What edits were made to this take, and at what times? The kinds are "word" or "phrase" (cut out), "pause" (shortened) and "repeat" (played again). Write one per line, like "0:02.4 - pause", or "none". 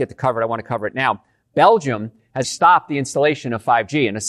0:02.4 - word